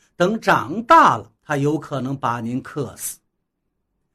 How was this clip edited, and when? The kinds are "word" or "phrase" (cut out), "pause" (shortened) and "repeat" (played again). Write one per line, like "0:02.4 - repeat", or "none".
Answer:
0:01.4 - pause